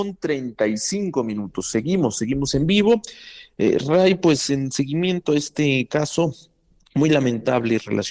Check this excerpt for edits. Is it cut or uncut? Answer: uncut